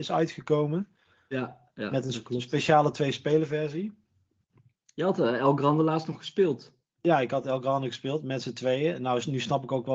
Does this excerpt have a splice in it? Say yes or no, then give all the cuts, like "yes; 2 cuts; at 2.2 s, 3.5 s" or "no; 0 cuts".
no; 0 cuts